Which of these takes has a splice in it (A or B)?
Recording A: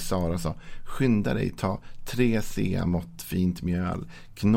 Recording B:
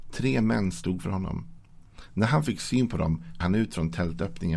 B